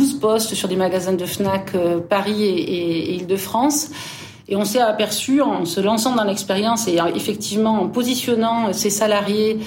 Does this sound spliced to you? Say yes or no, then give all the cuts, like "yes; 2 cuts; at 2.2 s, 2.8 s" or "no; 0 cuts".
no; 0 cuts